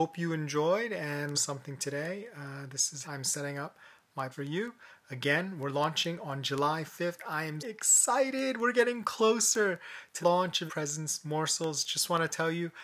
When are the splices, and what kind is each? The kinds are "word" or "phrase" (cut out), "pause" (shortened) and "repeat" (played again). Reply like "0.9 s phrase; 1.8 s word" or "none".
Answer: 1.3 s word; 3.0 s word; 4.3 s word; 7.6 s word; 10.2 s word; 10.7 s word